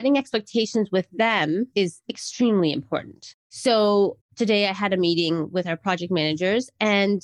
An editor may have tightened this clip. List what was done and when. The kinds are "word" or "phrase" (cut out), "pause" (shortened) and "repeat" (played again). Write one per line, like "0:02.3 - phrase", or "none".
none